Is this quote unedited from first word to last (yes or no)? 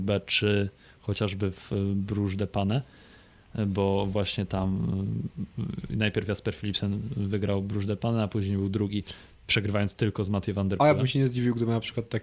yes